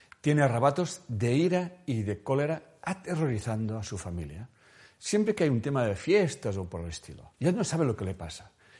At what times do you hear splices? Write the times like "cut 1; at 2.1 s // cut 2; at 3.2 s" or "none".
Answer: cut 1; at 7.3 s

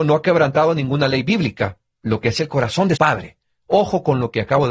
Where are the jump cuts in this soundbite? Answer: cut 1; at 2.4 s // cut 2; at 3.0 s

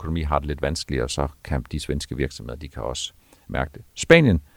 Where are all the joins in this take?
none

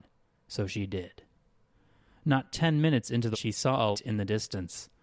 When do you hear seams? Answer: cut 1; at 3.3 s // cut 2; at 3.9 s

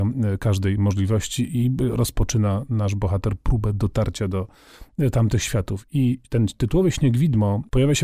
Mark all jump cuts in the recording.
none

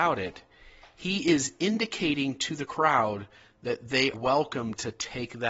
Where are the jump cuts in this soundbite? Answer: cut 1; at 4.1 s

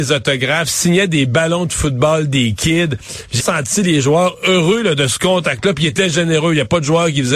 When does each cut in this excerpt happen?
cut 1; at 3.4 s

